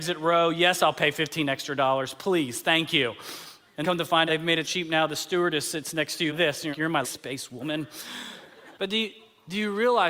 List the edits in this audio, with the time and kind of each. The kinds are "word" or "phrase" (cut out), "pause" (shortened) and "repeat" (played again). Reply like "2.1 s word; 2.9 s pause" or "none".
3.8 s word; 4.3 s word; 4.6 s word; 6.3 s word; 6.7 s word; 7.0 s word; 8.7 s pause

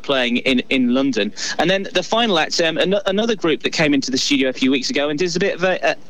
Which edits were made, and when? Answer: none

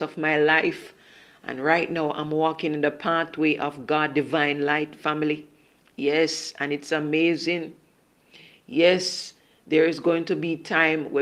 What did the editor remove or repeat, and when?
none

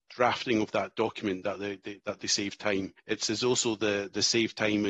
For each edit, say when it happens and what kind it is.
3.0 s pause

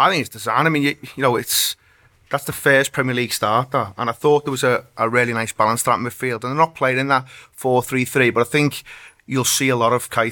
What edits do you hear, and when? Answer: none

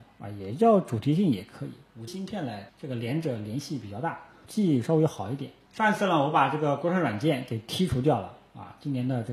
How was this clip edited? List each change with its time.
2.1 s word; 2.7 s pause; 4.4 s phrase; 5.7 s pause

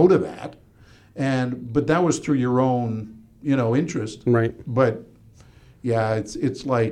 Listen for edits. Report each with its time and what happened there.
none

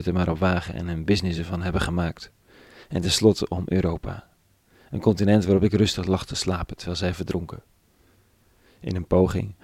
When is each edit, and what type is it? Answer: none

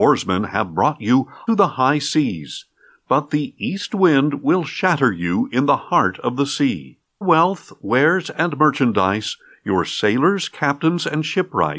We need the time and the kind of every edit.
1.5 s word; 7.2 s word

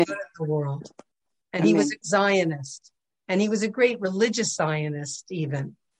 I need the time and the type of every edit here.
2.0 s word

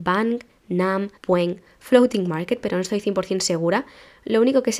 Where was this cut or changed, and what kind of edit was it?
1.2 s pause

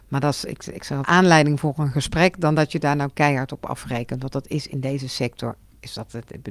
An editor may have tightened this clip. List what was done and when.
1.0 s phrase

